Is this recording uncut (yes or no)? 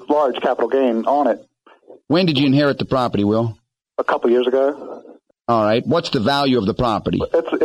yes